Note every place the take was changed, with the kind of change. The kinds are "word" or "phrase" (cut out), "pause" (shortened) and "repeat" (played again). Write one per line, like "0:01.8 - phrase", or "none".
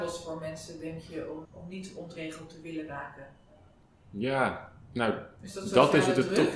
0:01.4 - word
0:03.7 - pause